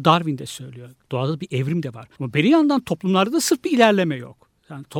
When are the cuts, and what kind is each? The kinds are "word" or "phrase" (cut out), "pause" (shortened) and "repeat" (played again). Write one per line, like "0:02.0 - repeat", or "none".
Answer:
0:02.1 - pause